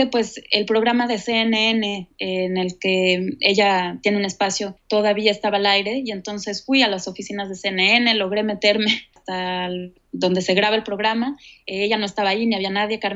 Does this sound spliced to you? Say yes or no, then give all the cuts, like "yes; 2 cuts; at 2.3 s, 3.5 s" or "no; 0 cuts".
no; 0 cuts